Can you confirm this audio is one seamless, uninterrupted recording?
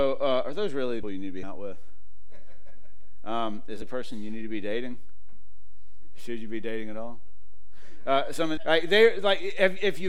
no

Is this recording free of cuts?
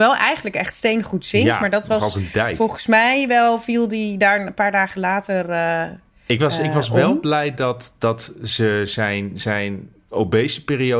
yes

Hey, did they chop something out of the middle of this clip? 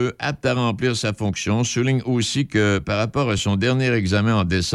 no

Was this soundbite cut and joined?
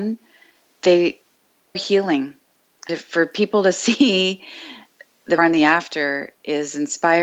yes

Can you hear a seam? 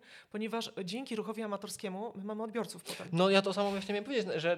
no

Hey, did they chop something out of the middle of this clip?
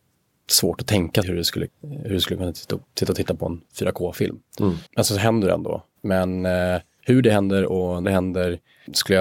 yes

